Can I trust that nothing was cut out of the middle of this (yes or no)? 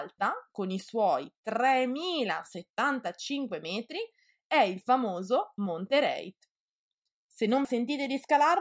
no